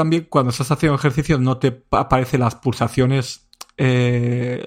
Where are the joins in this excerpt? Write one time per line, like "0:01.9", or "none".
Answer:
none